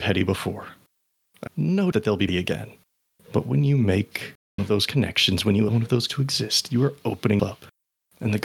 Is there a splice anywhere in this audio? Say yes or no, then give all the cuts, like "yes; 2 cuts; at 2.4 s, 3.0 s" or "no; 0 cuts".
yes; 7 cuts; at 1.5 s, 1.9 s, 2.3 s, 4.6 s, 5.7 s, 6.1 s, 7.4 s